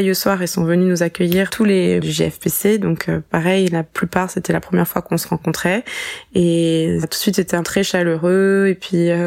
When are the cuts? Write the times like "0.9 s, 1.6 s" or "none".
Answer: 1.5 s, 2.0 s, 7.0 s, 7.6 s